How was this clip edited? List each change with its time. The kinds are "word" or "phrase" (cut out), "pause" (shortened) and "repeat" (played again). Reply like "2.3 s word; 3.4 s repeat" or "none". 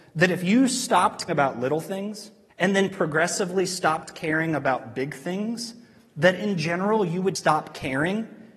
1.3 s word; 2.5 s pause; 7.4 s word